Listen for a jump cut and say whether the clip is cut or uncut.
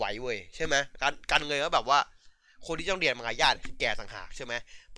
uncut